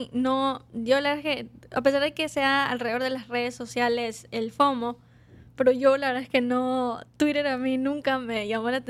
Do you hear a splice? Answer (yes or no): yes